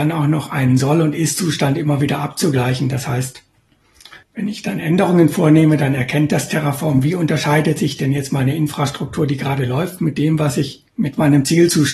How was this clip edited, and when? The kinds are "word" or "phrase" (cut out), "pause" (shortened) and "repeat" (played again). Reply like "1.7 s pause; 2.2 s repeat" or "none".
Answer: 4.2 s pause; 10.9 s pause